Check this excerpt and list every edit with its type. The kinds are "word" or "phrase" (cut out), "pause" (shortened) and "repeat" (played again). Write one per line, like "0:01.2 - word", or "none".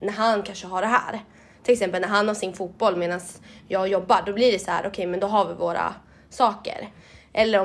none